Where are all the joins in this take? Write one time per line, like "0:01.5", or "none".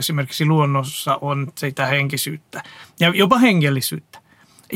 none